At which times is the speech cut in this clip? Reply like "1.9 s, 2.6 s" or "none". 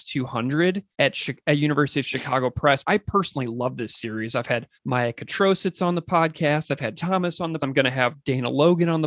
0.9 s, 2.8 s, 4.8 s, 7.0 s, 7.6 s